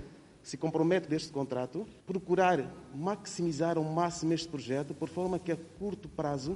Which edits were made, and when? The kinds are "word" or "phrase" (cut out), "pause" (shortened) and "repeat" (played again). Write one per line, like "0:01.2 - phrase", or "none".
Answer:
0:01.1 - phrase
0:02.0 - pause